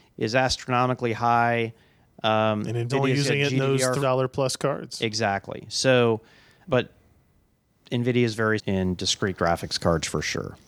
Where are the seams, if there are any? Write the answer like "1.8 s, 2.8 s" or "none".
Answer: 2.9 s, 4.0 s, 6.7 s, 8.6 s